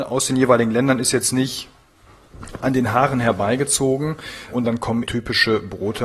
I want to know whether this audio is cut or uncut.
cut